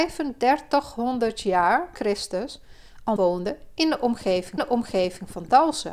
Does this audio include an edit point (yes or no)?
yes